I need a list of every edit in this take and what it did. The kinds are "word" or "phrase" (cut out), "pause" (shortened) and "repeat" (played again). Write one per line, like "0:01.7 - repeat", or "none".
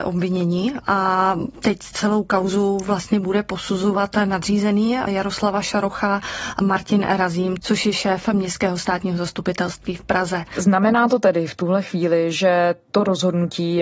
none